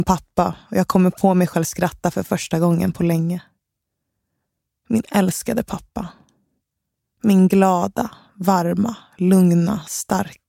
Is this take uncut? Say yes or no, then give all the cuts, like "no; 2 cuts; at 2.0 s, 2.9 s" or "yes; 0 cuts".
yes; 0 cuts